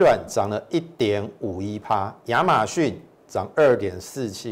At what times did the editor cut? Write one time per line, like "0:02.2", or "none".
0:03.2